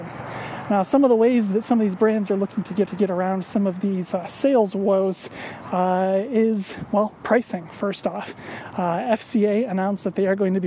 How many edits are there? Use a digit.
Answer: 1